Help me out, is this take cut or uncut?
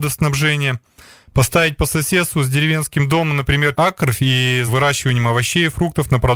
cut